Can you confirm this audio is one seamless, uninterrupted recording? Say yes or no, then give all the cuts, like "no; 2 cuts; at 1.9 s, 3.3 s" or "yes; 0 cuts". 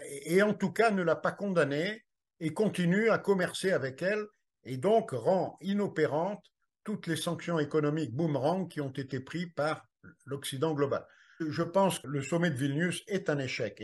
no; 1 cut; at 12.0 s